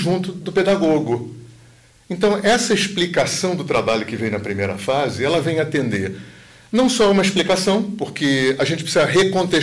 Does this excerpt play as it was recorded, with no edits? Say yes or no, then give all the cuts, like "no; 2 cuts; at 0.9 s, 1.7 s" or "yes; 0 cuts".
yes; 0 cuts